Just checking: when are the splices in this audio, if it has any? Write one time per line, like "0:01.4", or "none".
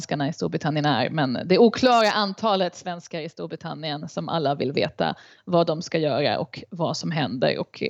none